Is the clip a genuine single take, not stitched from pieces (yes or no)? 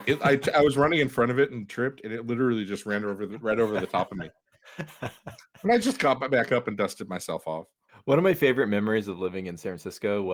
yes